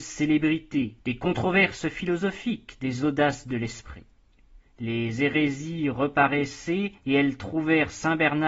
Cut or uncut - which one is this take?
cut